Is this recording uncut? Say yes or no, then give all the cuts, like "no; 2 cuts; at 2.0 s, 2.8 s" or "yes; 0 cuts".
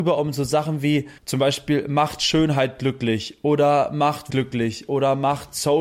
no; 2 cuts; at 1.2 s, 4.3 s